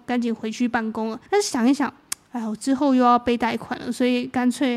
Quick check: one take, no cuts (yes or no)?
no